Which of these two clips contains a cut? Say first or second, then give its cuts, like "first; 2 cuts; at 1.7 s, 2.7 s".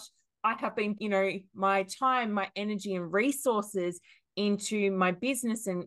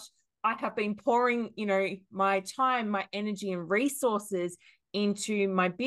first; 1 cut; at 1.0 s